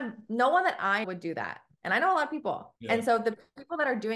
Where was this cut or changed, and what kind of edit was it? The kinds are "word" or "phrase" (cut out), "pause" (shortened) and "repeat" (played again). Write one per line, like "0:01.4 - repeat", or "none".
0:01.0 - word
0:02.8 - pause